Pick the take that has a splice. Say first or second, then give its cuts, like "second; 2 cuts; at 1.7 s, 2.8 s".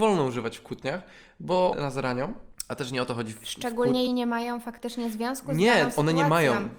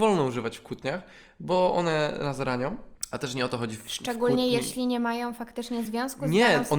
first; 2 cuts; at 1.7 s, 4.1 s